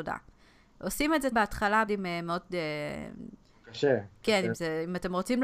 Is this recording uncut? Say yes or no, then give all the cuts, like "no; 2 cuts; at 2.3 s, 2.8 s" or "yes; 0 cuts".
no; 2 cuts; at 1.3 s, 1.9 s